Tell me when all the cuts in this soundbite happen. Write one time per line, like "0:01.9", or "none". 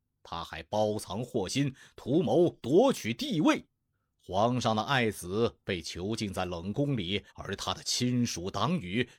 0:03.9
0:07.3